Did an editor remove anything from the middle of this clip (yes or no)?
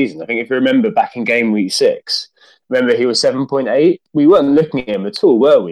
no